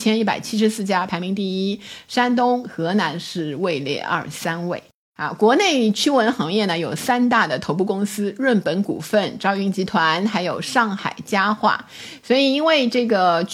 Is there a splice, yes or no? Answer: no